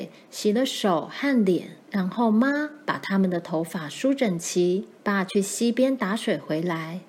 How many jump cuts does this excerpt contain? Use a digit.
2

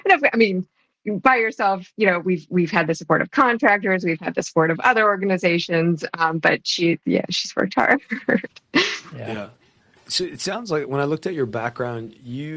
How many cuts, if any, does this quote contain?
0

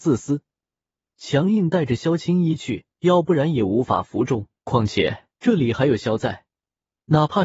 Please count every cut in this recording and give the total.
3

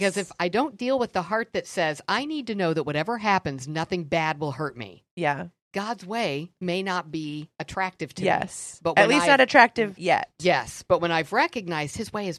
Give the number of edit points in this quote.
1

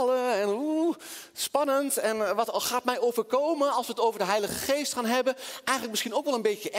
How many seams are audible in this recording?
0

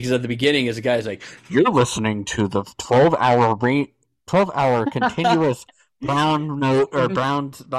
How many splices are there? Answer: 0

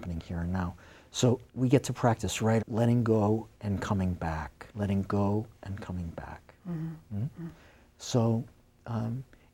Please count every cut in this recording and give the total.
4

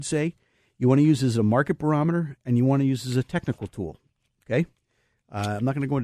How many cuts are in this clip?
0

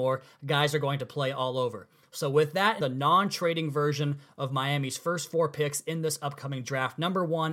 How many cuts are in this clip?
1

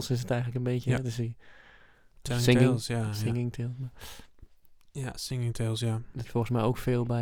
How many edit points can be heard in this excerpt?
1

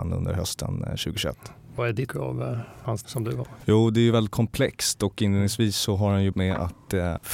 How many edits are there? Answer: 4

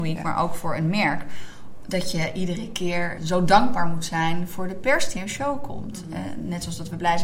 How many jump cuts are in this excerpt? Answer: 2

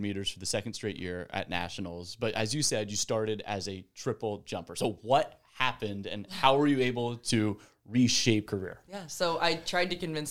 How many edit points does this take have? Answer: 1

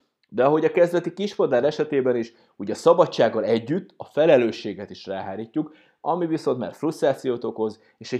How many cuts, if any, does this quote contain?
0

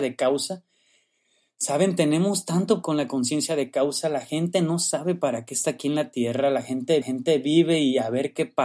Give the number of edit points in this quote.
2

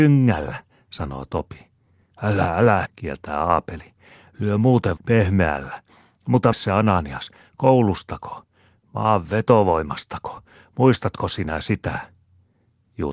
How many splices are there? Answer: 3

